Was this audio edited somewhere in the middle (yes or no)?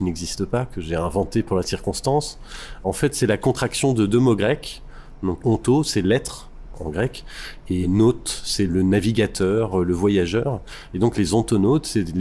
yes